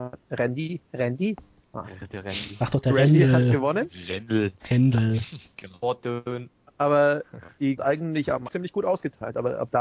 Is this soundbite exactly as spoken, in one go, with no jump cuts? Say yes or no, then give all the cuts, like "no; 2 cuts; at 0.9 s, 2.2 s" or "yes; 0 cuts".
no; 2 cuts; at 7.8 s, 8.5 s